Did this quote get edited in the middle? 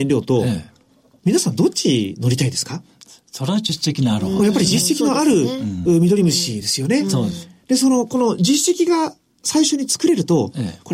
no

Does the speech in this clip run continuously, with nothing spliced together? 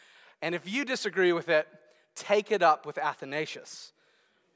yes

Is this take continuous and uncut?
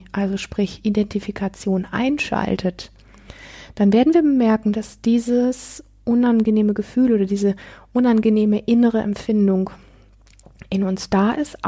yes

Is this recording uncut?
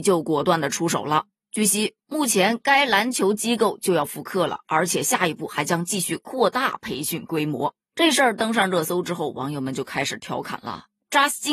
yes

